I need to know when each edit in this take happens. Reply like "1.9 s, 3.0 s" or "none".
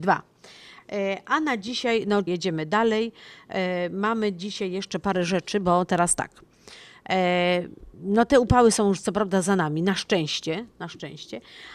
2.3 s, 7.9 s